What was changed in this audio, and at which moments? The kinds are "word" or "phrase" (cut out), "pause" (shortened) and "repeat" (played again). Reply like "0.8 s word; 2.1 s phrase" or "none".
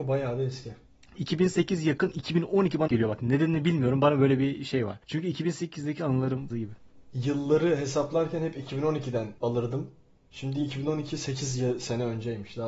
1.2 s word; 2.9 s word; 5.0 s pause; 6.5 s word; 9.4 s pause

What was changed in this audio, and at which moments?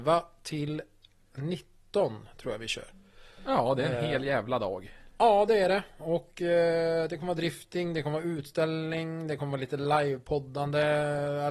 none

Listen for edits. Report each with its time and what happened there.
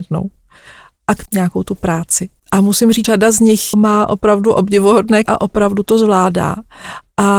1.3 s phrase; 2.4 s pause; 3.0 s word; 3.7 s word; 5.3 s word

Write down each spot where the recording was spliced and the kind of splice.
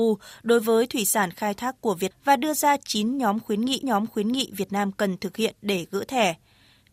2.1 s word; 3.8 s repeat

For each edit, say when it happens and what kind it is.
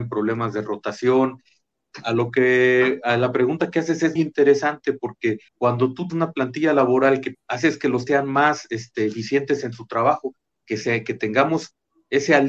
4.2 s word; 5.5 s pause; 6.1 s word; 7.3 s phrase; 8.1 s word

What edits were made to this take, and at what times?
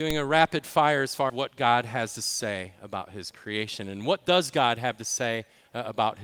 1.3 s word

